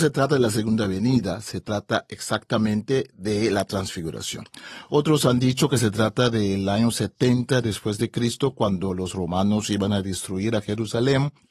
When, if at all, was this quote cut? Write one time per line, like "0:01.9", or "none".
none